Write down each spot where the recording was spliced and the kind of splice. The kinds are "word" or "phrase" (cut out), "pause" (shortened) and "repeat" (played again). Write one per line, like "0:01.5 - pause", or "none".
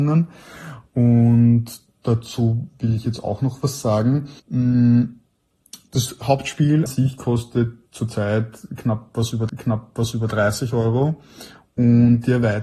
0:04.4 - pause
0:06.9 - word
0:09.5 - repeat